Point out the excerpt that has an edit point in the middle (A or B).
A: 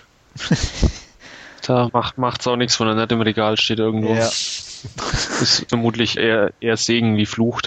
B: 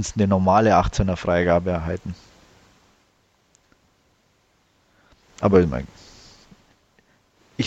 A